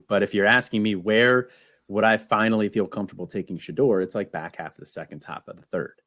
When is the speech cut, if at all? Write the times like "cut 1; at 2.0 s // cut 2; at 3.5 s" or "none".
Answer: none